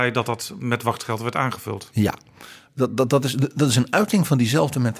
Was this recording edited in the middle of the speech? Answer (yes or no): no